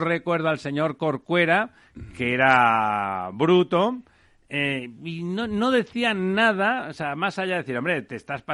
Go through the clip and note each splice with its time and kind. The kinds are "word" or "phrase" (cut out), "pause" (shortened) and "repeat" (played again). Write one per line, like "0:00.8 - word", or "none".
none